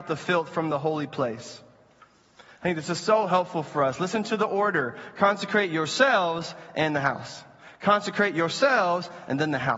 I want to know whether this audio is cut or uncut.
uncut